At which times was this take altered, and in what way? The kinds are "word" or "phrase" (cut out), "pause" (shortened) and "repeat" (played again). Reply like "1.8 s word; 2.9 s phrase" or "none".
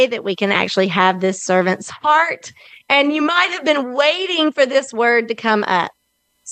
none